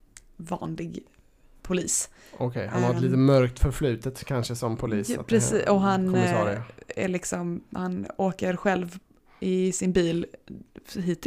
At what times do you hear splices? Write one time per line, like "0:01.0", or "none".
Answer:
none

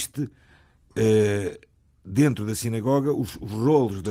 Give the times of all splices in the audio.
none

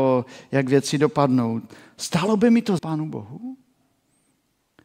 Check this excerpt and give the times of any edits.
0:02.8

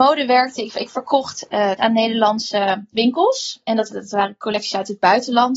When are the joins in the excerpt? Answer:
0:01.8
0:03.9

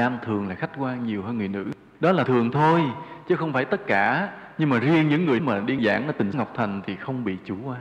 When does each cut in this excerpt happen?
0:02.3
0:05.4
0:05.8
0:06.3

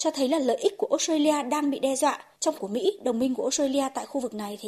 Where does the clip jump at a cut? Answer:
0:02.5

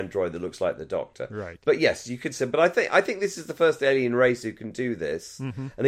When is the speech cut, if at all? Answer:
none

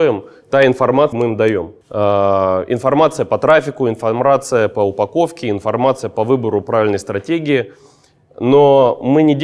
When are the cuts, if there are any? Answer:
0:01.1
0:01.8

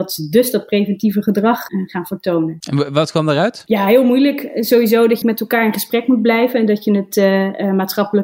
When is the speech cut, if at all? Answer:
0:05.2

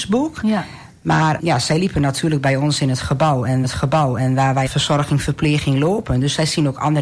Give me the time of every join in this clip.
0:01.4
0:03.6
0:04.7

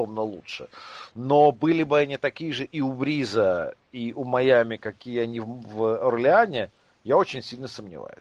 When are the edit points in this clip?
none

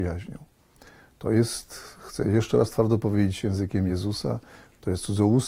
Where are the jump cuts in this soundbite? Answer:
none

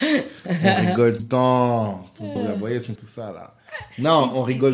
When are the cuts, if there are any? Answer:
0:01.2
0:02.4
0:03.0

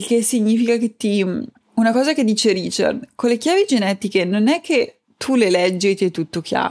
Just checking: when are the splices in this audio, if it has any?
none

